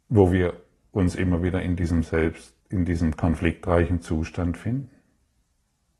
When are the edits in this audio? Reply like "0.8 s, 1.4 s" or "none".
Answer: 2.6 s